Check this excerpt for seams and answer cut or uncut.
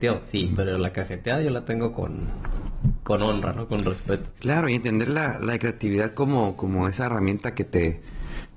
uncut